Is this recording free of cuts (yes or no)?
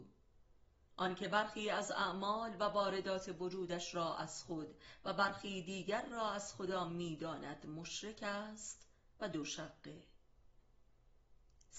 yes